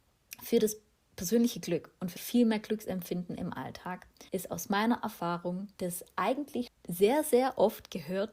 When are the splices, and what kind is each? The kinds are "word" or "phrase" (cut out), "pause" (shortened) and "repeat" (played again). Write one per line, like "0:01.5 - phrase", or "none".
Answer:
0:02.2 - word
0:04.3 - pause
0:05.7 - pause
0:06.7 - word